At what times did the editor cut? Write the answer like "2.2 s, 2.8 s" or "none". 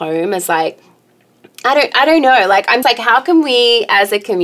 2.8 s